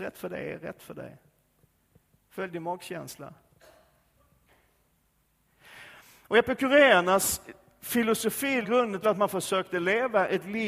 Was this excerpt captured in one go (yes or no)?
no